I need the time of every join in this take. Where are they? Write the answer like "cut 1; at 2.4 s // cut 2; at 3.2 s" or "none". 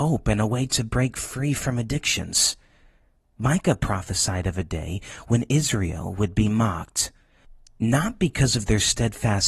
none